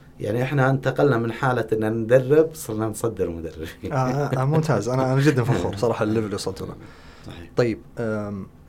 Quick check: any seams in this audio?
no; 0 cuts

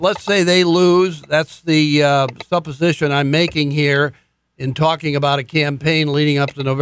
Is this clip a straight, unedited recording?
yes; 0 cuts

